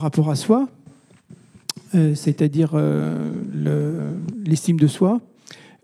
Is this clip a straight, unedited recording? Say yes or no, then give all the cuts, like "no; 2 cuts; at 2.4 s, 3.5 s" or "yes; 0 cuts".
yes; 0 cuts